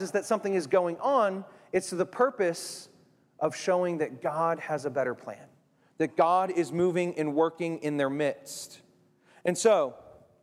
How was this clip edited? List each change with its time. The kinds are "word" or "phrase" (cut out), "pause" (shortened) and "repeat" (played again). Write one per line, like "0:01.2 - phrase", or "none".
none